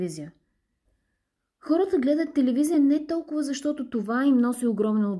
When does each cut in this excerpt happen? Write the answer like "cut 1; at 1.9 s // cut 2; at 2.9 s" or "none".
none